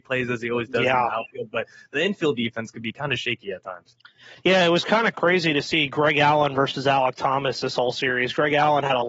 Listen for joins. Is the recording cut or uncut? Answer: uncut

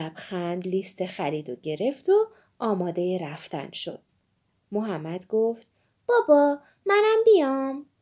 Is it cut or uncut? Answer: uncut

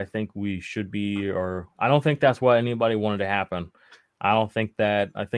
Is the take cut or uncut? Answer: uncut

